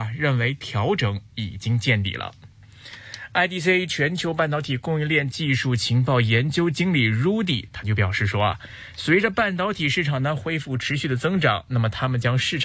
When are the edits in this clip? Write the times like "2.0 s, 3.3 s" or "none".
none

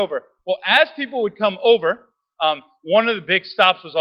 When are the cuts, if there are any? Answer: none

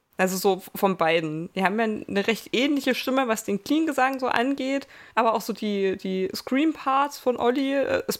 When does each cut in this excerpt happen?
5.1 s

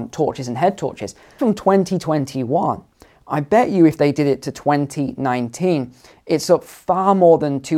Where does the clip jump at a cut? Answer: 1.4 s

